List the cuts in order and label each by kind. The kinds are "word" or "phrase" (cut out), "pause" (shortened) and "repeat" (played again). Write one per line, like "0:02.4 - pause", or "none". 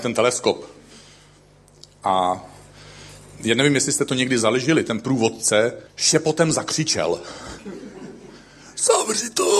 0:05.9 - pause

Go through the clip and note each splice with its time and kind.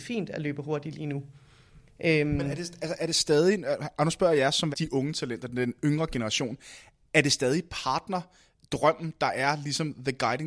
0:04.7 - word

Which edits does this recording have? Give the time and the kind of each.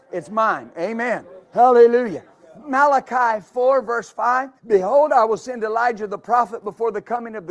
0:01.4 - pause
0:04.6 - pause

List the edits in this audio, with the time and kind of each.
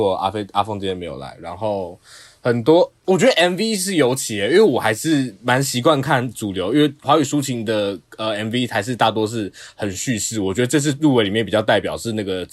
none

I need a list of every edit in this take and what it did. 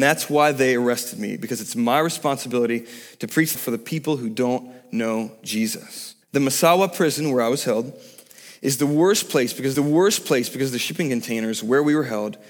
0:03.5 - word
0:06.2 - pause
0:09.7 - repeat

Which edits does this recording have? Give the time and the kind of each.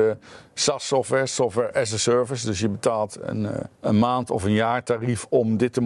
0:03.7 - pause

